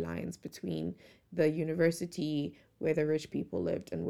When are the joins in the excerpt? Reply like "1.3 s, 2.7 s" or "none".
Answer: none